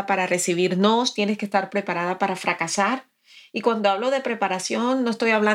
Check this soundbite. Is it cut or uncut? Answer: uncut